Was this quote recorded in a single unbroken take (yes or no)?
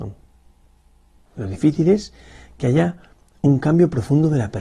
yes